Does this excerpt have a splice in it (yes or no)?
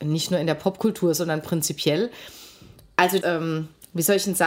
yes